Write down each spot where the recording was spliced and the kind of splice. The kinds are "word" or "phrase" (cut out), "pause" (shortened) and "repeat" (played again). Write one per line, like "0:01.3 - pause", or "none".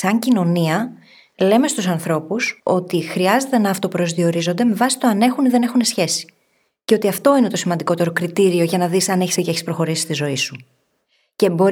0:02.6 - pause
0:09.4 - word